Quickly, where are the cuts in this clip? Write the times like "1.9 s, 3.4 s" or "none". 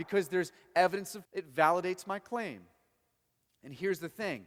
1.2 s

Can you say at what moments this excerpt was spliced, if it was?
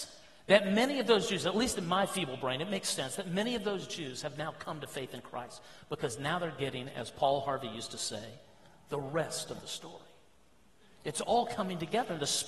none

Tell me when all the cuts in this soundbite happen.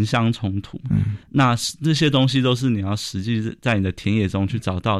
1.2 s

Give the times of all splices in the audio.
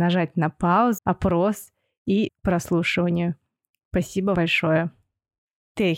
1.0 s, 2.3 s, 4.3 s

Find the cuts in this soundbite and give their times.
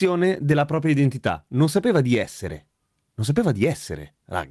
none

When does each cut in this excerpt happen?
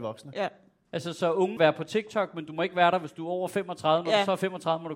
1.6 s

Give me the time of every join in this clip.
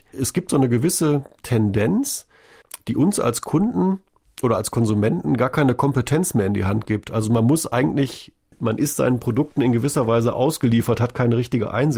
none

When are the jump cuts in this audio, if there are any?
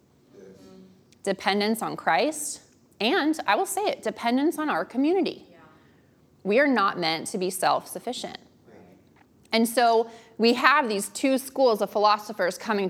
none

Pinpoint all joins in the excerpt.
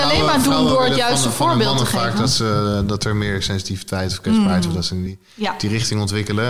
none

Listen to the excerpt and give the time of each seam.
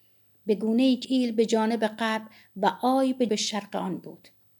1.0 s, 3.3 s

